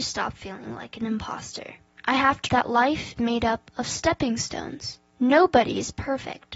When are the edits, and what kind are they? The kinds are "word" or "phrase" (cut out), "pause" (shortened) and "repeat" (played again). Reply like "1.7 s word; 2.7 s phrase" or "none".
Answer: 1.9 s pause; 2.5 s word; 3.2 s word; 5.1 s pause